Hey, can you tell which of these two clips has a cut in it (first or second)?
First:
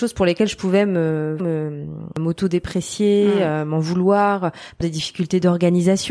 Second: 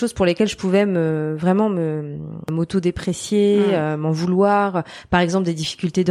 first